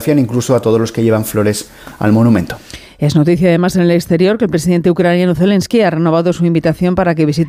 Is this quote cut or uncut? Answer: uncut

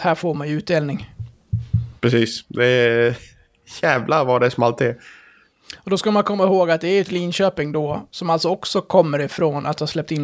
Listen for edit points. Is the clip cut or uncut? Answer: cut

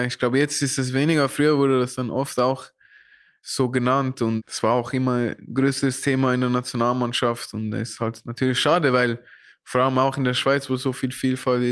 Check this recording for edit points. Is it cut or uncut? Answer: uncut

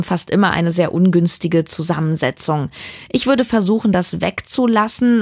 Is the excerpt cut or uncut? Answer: uncut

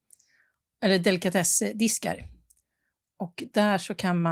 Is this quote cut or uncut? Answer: uncut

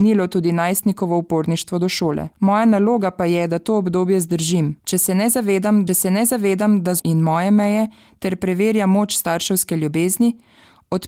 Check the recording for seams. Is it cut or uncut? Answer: cut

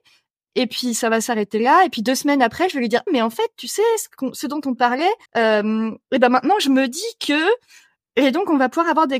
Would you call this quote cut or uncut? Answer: cut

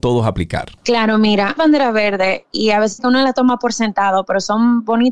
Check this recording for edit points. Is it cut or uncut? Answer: cut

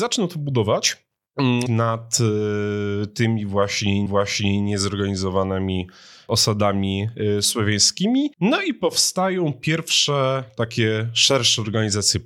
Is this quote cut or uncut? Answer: cut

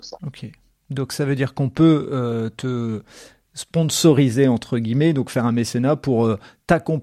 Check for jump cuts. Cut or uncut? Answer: uncut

